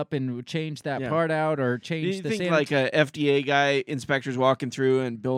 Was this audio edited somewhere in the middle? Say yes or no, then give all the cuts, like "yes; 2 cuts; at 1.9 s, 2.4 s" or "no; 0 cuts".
no; 0 cuts